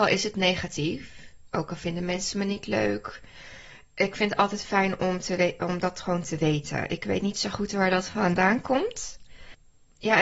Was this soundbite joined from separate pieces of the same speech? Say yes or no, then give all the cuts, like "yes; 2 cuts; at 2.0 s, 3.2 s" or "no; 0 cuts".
no; 0 cuts